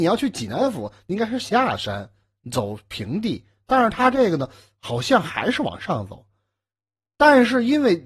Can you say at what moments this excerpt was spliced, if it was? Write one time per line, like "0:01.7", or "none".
none